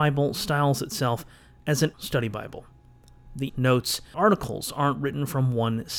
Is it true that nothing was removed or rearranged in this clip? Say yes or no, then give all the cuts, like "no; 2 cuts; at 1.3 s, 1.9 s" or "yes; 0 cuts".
no; 3 cuts; at 1.9 s, 3.5 s, 4.1 s